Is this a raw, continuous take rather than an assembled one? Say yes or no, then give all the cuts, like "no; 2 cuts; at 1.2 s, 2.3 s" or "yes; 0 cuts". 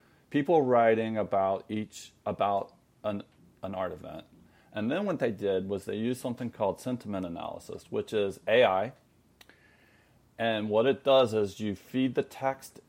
yes; 0 cuts